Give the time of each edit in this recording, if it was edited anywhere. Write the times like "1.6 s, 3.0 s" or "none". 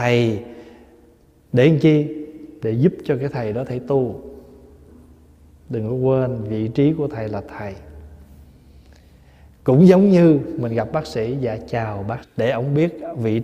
12.2 s